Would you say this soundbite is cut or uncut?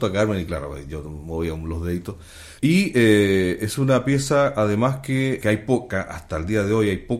cut